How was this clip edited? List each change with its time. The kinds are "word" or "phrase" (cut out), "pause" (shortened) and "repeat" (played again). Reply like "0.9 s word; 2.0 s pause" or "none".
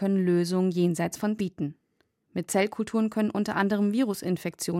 1.4 s word